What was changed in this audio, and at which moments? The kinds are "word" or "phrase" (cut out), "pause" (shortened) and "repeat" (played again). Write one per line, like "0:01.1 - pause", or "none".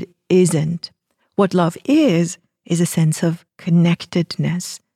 0:03.5 - pause